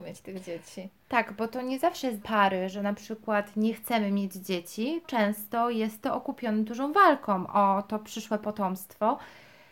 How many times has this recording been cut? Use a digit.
2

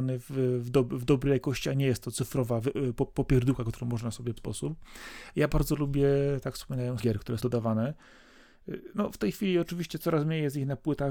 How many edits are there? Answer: 3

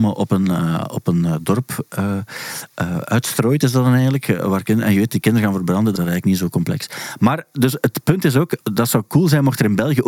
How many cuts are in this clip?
2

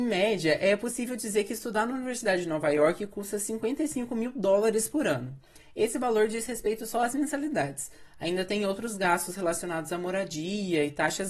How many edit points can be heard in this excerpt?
0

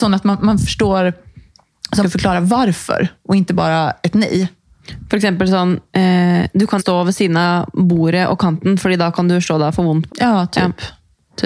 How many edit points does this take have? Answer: 4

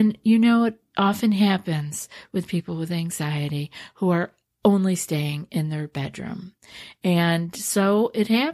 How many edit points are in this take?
0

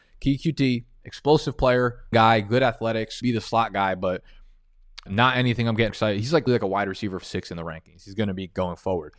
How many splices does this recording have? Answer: 6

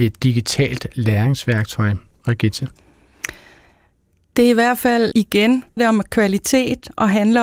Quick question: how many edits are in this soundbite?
2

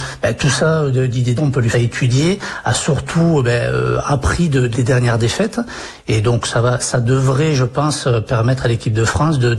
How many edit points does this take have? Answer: 3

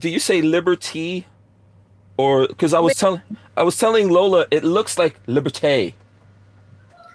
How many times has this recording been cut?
0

